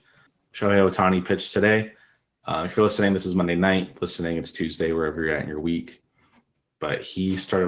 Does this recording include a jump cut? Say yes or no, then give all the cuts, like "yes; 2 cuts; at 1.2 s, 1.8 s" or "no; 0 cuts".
no; 0 cuts